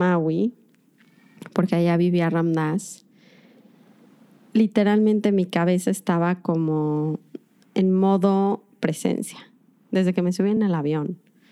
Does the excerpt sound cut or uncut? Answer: uncut